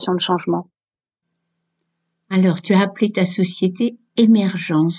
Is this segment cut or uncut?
uncut